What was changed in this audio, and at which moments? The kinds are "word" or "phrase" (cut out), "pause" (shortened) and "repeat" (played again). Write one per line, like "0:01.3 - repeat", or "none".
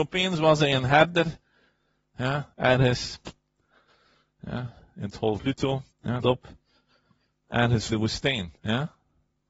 0:02.5 - pause
0:05.4 - word
0:05.9 - pause
0:06.2 - word
0:07.9 - word
0:08.6 - pause